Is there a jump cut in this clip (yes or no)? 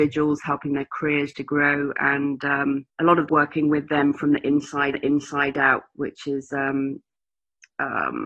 yes